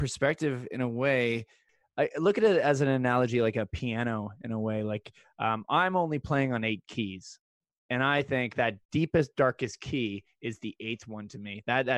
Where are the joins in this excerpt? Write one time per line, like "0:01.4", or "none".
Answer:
none